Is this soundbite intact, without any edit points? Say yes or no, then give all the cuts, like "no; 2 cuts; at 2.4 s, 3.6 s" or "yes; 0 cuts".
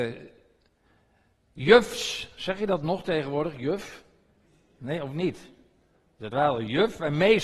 no; 1 cut; at 6.3 s